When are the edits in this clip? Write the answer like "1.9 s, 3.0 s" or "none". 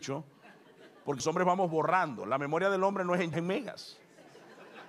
1.2 s, 3.3 s